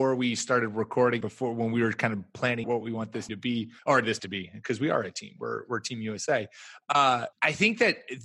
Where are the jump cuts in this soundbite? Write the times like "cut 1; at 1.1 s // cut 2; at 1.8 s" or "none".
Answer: cut 1; at 1.2 s // cut 2; at 2.6 s // cut 3; at 3.3 s // cut 4; at 3.8 s // cut 5; at 4.2 s // cut 6; at 7.3 s